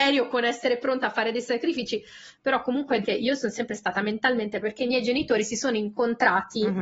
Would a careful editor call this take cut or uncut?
cut